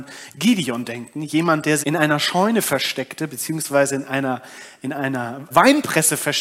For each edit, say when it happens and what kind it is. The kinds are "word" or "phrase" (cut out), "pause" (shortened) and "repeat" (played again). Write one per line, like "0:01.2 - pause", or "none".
0:01.8 - word
0:05.5 - word